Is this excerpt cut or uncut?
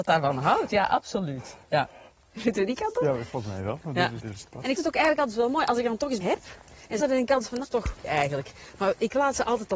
cut